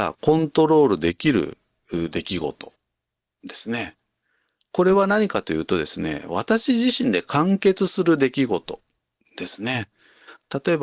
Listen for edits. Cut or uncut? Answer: uncut